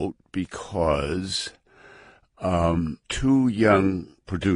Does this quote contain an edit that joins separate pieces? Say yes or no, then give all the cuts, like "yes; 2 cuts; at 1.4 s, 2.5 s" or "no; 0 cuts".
yes; 1 cut; at 3.0 s